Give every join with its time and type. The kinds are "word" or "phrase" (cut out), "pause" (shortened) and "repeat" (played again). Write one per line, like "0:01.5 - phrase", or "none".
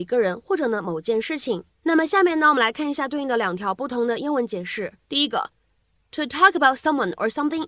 0:01.7 - pause
0:05.0 - pause

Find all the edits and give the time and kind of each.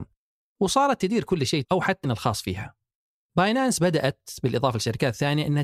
0:01.6 - phrase
0:02.0 - phrase

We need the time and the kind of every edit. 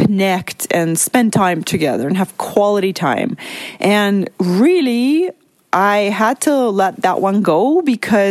none

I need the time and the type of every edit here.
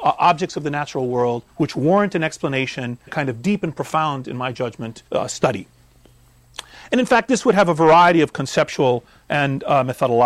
0:01.5 - pause
0:03.1 - word
0:05.1 - word

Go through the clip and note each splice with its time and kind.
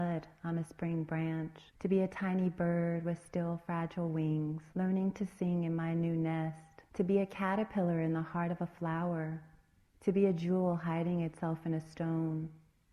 0:01.7 - pause
0:04.7 - pause
0:06.9 - pause
0:09.8 - pause

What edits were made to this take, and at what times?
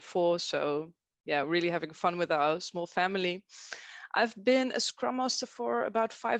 none

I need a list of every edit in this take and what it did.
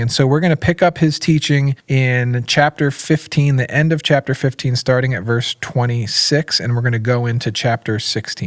0:01.8 - pause

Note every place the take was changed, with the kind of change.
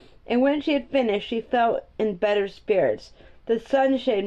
none

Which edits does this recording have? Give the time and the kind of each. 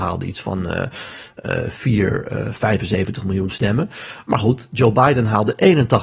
none

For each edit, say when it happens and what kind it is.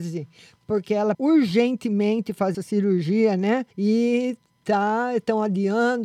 0:01.1 - word
0:02.5 - word
0:03.7 - pause

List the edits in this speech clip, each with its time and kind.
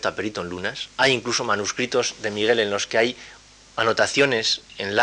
none

